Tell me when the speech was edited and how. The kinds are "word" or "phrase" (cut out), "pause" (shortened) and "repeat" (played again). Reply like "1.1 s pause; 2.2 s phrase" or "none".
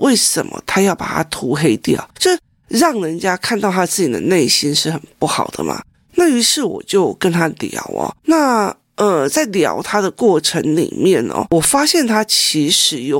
2.1 s pause